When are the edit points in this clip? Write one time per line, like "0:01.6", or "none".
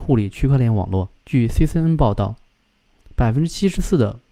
0:01.2